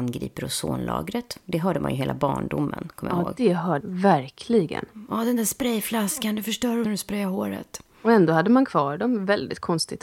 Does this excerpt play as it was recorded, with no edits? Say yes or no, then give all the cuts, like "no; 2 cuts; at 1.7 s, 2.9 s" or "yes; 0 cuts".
no; 2 cuts; at 3.8 s, 6.8 s